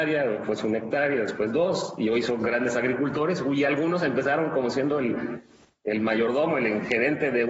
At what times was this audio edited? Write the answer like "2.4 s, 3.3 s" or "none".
none